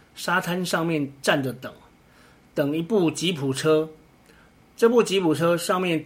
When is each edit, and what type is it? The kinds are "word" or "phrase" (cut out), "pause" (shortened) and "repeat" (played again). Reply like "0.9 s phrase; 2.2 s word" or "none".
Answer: none